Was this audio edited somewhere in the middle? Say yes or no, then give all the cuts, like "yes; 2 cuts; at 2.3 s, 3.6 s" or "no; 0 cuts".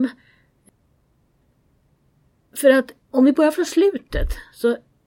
yes; 1 cut; at 3.0 s